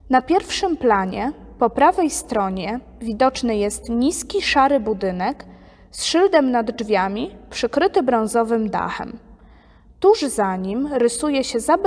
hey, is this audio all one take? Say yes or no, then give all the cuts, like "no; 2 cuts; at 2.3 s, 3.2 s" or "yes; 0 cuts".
yes; 0 cuts